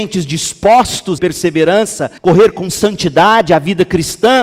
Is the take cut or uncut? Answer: cut